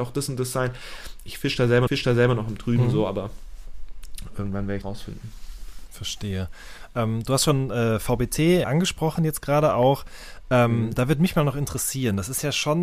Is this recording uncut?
no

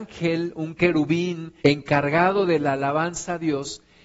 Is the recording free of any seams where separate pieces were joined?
no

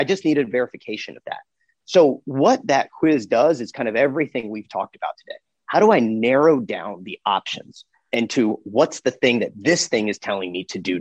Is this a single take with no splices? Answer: yes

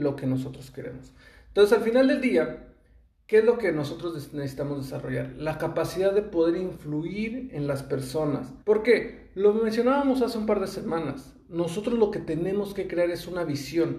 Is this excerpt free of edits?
no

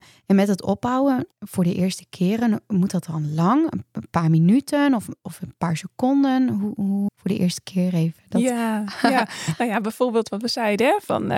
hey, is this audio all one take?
no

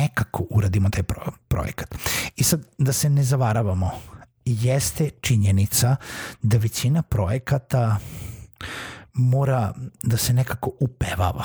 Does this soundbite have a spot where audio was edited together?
no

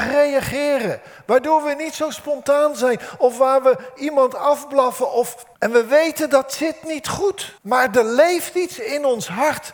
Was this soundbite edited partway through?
yes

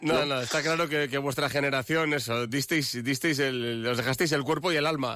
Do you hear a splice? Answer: no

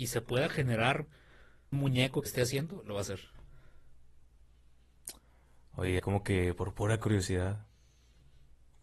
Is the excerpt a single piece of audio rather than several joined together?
no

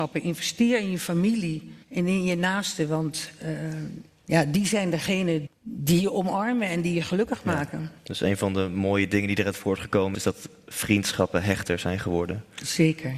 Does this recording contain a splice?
yes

